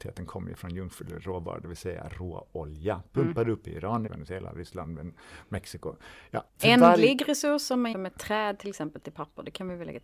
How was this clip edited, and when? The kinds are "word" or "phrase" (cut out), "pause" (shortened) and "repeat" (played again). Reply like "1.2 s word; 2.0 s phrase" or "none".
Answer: 4.1 s word; 6.5 s pause; 7.9 s word